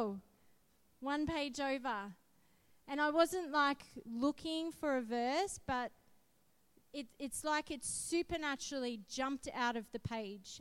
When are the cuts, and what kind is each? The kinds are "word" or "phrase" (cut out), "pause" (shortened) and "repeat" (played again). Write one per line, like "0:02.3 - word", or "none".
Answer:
none